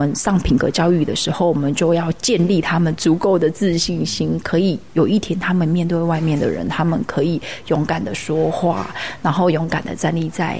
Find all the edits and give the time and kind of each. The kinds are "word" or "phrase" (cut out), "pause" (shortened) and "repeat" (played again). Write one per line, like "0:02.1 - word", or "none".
none